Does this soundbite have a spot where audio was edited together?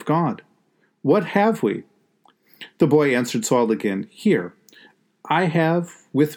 no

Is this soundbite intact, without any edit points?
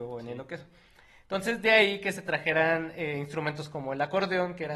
yes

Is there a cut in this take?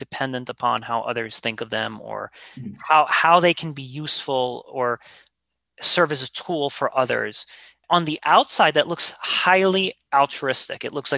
no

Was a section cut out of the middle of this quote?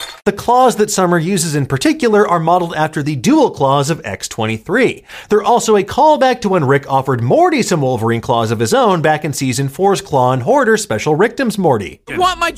no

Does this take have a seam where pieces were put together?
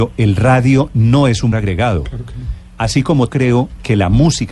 yes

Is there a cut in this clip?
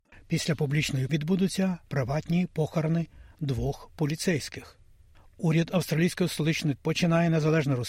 yes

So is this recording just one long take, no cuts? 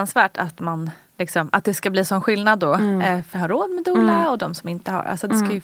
no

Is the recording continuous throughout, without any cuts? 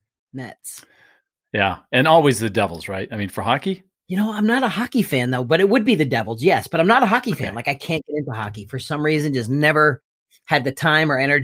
yes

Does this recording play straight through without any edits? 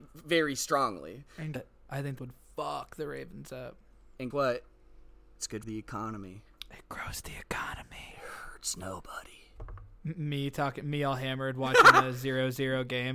no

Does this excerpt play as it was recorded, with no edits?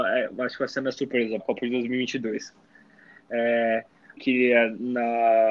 no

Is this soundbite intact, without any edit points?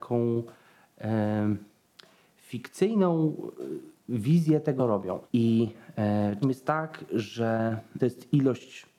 no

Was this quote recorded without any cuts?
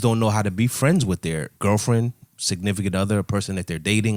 no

